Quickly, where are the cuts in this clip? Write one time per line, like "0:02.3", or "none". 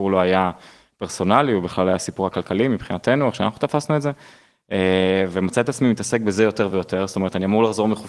none